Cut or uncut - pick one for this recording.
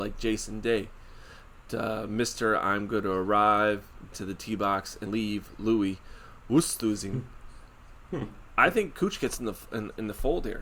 cut